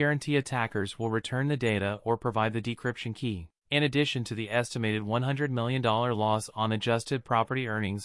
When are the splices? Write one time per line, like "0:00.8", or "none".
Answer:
0:03.6